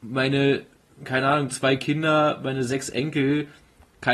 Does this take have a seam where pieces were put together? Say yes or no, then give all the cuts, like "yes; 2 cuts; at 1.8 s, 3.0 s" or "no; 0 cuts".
no; 0 cuts